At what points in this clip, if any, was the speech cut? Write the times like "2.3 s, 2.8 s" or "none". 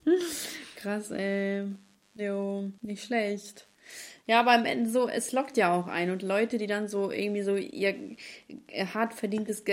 2.8 s